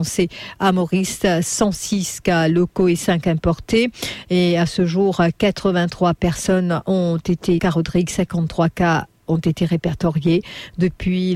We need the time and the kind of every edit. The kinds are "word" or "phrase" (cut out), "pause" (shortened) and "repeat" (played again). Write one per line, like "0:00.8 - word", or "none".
0:07.6 - phrase